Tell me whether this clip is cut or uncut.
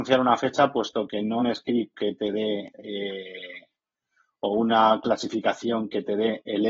cut